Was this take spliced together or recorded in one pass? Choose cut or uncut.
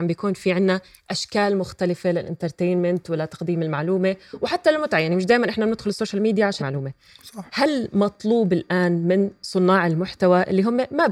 cut